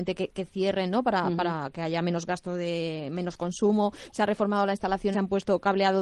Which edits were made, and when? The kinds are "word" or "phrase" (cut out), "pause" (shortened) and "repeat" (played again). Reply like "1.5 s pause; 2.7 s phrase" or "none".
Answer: 5.1 s word